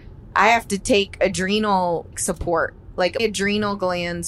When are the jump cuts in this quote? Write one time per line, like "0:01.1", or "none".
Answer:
0:02.1
0:03.2

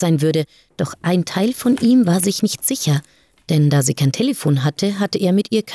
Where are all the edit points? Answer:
none

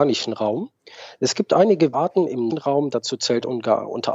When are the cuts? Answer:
0:01.9
0:02.5

